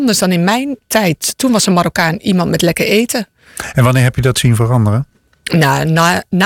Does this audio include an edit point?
no; 0 cuts

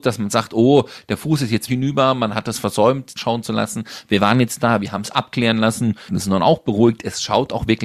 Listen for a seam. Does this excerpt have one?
yes; 3 cuts; at 1.7 s, 3.2 s, 6.1 s

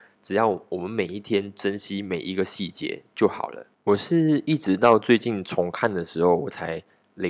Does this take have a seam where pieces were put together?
yes; 1 cut; at 3.7 s

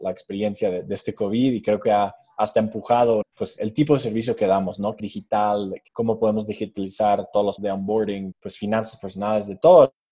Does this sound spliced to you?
yes; 6 cuts; at 3.2 s, 3.6 s, 5.0 s, 5.9 s, 7.6 s, 8.3 s

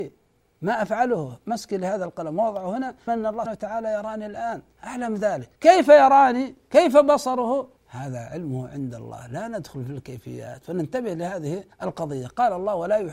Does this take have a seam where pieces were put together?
yes; 6 cuts; at 3.1 s, 3.5 s, 4.7 s, 5.5 s, 7.8 s, 11.7 s

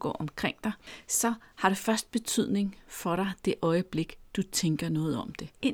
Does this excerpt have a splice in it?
no; 0 cuts

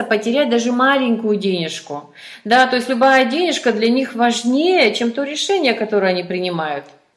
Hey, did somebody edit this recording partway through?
no; 0 cuts

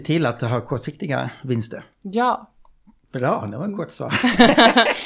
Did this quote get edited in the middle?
no; 0 cuts

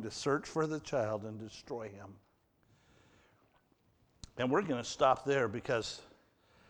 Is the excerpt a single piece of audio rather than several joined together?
yes; 0 cuts

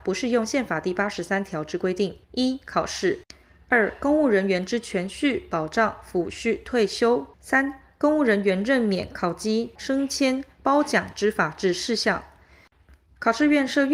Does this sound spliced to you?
yes; 3 cuts; at 2.2 s, 7.3 s, 9.8 s

